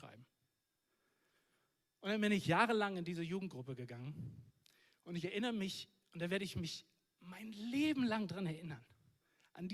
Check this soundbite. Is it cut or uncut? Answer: uncut